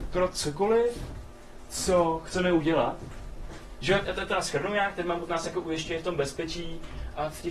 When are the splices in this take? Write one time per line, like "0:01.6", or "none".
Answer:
0:04.0